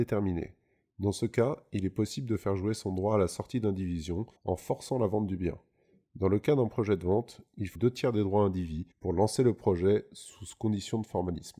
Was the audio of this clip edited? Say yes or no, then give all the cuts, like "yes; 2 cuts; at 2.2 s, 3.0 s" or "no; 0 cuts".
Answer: yes; 3 cuts; at 4.4 s, 7.7 s, 8.9 s